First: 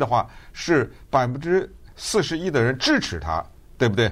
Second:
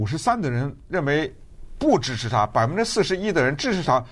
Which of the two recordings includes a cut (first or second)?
first